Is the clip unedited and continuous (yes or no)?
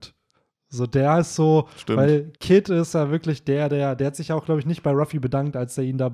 no